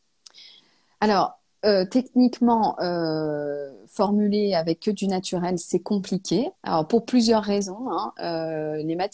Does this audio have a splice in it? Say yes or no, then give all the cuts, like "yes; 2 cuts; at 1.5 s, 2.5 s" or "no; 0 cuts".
yes; 1 cut; at 6.6 s